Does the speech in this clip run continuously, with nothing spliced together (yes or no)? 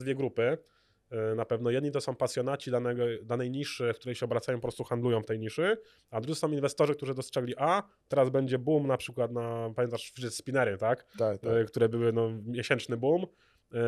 yes